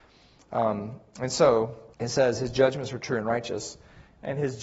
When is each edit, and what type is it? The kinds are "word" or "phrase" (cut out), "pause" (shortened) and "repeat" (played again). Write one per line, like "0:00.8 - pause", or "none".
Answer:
0:01.9 - pause